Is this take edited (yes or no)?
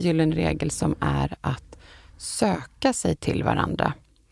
no